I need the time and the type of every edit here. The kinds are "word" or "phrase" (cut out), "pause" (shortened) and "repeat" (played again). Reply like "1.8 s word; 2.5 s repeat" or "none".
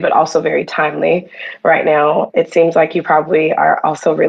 none